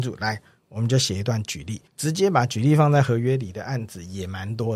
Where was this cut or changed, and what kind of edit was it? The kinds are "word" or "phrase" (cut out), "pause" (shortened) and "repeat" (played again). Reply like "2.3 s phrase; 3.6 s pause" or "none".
1.9 s pause